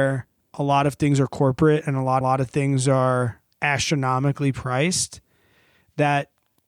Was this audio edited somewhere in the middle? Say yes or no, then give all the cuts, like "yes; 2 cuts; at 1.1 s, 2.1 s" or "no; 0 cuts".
yes; 2 cuts; at 2.2 s, 3.5 s